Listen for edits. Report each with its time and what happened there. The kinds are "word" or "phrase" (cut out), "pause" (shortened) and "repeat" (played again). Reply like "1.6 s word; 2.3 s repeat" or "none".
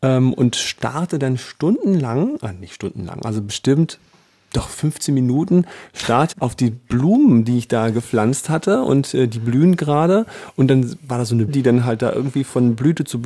6.3 s phrase; 11.5 s word

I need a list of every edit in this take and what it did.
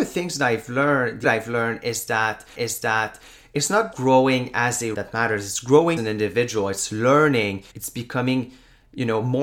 1.2 s phrase; 2.5 s repeat; 3.9 s word; 4.9 s word; 6.0 s word; 7.7 s pause

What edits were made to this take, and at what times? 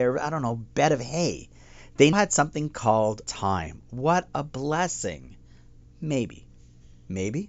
2.1 s word; 3.2 s word

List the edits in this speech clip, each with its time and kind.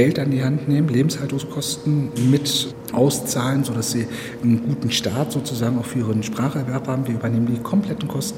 2.9 s word

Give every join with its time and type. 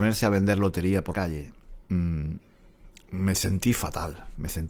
1.1 s word; 1.8 s pause

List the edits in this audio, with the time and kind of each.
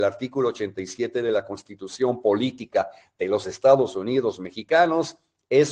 none

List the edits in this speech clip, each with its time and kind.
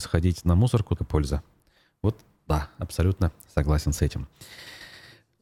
1.0 s word

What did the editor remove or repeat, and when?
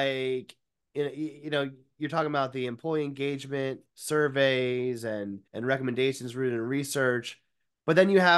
3.9 s pause; 5.5 s pause

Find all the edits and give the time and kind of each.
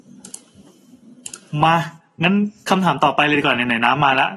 none

